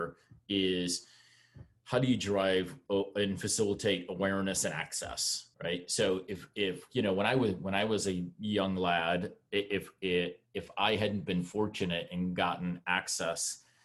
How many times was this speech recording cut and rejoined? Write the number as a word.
two